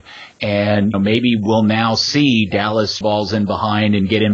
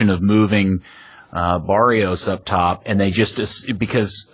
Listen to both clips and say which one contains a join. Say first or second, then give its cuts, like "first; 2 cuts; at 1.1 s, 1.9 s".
first; 2 cuts; at 0.9 s, 3.0 s